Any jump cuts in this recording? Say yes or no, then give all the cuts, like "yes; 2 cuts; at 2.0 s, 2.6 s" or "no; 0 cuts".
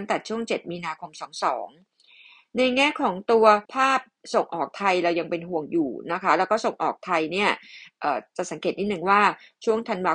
yes; 1 cut; at 3.6 s